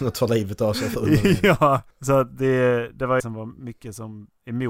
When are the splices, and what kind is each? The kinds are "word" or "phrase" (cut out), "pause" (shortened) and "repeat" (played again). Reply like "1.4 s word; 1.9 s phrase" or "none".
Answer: 1.9 s pause; 3.2 s phrase